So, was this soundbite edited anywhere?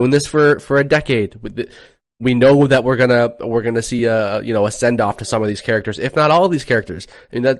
no; 0 cuts

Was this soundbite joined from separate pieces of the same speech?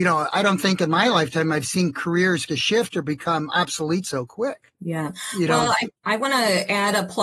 yes; 3 cuts; at 2.4 s, 4.7 s, 6.0 s

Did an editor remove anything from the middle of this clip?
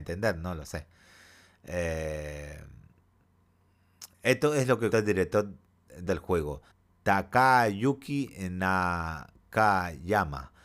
yes; 4 cuts; at 4.1 s, 4.9 s, 6.1 s, 6.7 s

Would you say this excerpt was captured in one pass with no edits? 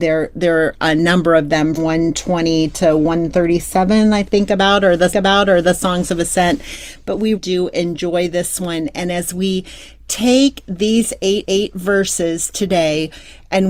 no; 4 cuts; at 1.8 s, 5.1 s, 7.4 s, 11.4 s

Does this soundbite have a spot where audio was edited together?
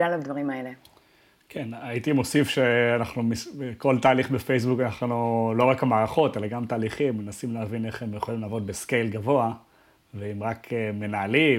no; 0 cuts

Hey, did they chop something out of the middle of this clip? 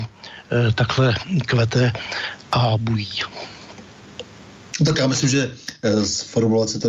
no; 0 cuts

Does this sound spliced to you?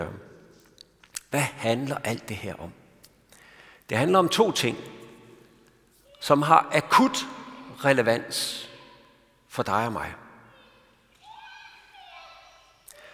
no; 0 cuts

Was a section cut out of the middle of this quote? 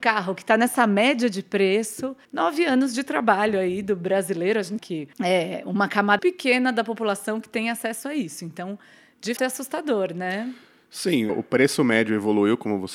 yes; 6 cuts; at 2.2 s, 4.8 s, 5.1 s, 6.2 s, 9.4 s, 11.3 s

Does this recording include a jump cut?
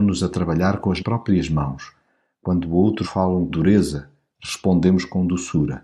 yes; 3 cuts; at 1.0 s, 3.0 s, 3.5 s

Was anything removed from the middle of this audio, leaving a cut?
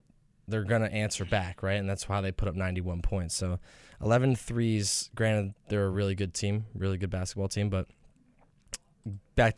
no; 0 cuts

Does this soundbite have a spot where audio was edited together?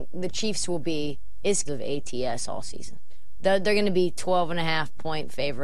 yes; 1 cut; at 1.7 s

